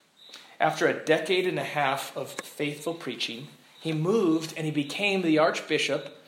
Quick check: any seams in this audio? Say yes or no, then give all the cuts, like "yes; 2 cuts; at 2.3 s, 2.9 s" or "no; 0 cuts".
no; 0 cuts